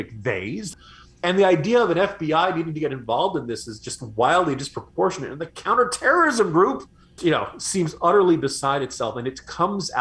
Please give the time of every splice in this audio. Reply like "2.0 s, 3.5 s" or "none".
7.2 s